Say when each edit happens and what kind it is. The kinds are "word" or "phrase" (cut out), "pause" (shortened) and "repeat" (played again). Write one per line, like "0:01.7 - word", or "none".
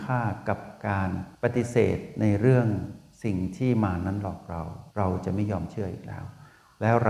0:04.9 - pause